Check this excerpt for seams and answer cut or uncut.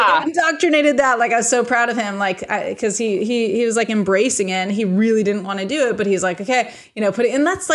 uncut